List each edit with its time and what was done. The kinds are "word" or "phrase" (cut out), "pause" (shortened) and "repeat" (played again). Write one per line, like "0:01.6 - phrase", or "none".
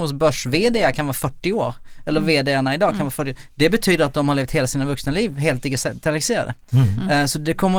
none